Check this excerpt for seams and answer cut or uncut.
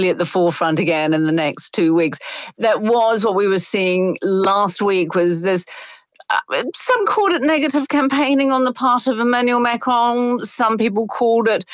uncut